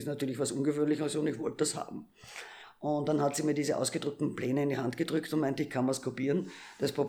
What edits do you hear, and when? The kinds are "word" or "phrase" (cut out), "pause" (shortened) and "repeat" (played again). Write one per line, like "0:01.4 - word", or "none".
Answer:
none